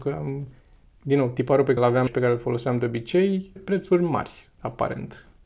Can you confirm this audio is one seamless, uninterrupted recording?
no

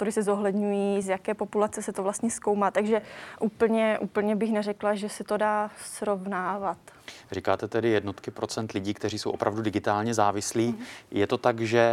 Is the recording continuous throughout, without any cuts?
yes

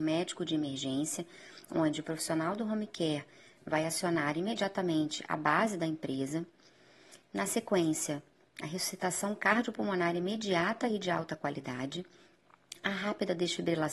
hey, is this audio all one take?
yes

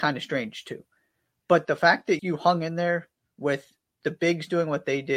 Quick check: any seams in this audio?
yes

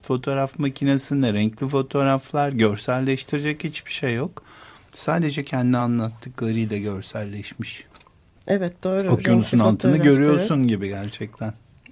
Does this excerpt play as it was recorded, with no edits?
yes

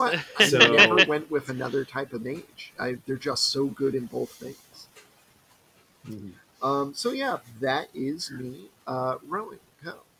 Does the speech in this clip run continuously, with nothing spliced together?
yes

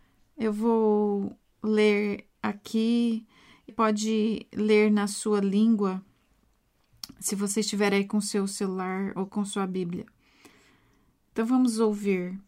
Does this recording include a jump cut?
yes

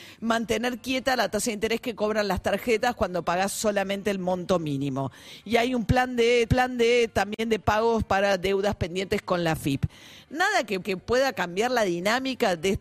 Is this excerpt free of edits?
no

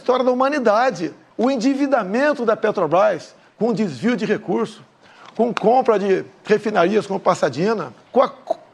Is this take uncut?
yes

